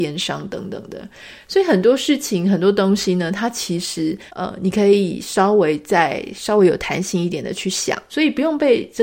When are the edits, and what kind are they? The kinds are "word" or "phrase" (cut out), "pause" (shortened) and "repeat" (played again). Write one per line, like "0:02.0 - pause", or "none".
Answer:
0:04.3 - pause
0:08.1 - word